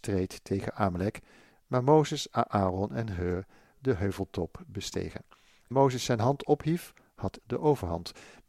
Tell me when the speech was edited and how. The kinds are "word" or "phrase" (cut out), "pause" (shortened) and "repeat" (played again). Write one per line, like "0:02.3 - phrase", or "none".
0:03.7 - word
0:05.7 - word
0:07.4 - word